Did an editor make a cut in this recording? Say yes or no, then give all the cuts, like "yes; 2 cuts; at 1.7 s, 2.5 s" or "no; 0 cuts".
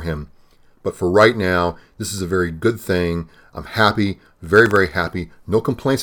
no; 0 cuts